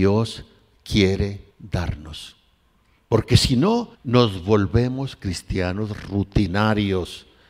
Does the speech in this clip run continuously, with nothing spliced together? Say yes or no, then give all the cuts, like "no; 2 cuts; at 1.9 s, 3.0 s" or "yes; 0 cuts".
no; 2 cuts; at 1.5 s, 3.9 s